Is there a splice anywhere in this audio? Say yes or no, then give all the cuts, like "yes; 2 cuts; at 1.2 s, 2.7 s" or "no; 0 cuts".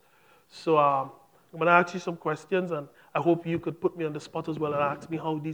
no; 0 cuts